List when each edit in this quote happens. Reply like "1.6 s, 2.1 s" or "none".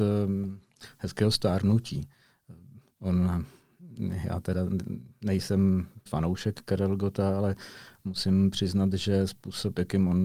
6.1 s